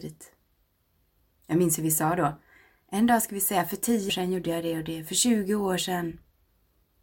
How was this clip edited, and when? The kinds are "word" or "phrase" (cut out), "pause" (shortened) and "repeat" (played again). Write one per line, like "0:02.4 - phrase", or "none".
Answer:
0:04.1 - word